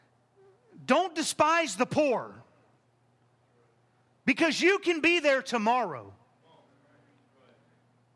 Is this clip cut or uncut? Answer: uncut